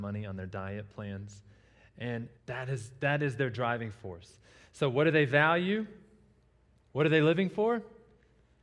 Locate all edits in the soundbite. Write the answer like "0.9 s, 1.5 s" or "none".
2.4 s

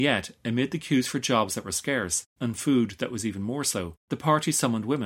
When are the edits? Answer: 2.3 s, 4.0 s

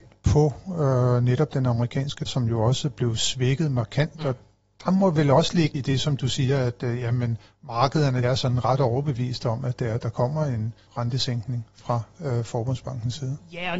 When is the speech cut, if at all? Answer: 2.3 s, 5.7 s, 8.2 s, 10.9 s

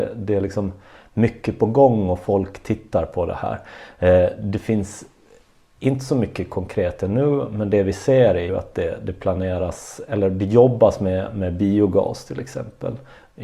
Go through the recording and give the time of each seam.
8.5 s

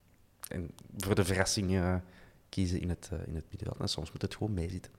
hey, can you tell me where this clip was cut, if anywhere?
none

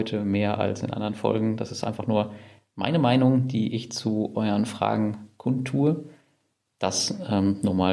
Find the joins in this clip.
none

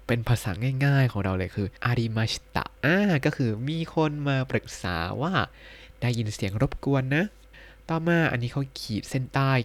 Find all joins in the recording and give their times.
1.8 s, 2.8 s, 7.5 s

